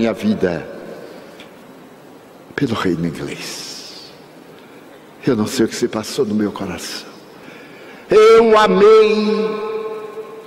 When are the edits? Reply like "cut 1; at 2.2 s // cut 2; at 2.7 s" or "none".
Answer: none